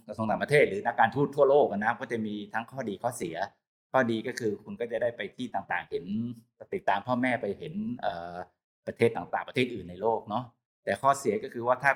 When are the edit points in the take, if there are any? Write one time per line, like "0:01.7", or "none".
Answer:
none